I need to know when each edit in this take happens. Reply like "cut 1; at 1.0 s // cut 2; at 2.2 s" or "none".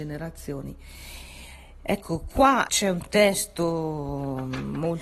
cut 1; at 2.7 s